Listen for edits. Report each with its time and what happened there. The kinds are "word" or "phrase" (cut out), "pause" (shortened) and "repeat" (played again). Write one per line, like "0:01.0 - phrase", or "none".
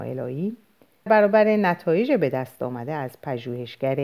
0:01.1 - word